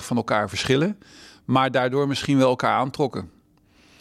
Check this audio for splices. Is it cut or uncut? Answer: uncut